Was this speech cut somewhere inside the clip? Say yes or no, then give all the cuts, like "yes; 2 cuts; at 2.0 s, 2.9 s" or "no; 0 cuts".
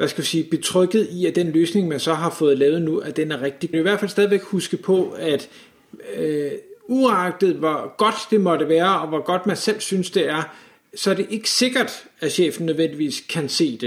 yes; 1 cut; at 3.7 s